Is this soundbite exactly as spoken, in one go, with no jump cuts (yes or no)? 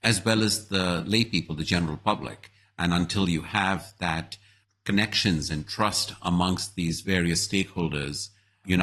no